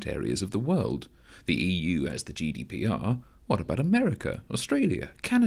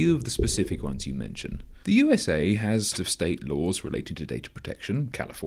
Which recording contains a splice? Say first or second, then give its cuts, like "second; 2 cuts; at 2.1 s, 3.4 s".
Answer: second; 2 cuts; at 1.8 s, 2.9 s